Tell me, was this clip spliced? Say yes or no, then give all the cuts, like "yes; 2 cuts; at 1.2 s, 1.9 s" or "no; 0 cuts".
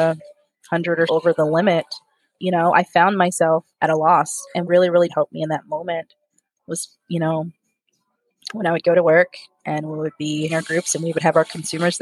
yes; 4 cuts; at 1.1 s, 4.6 s, 5.1 s, 10.5 s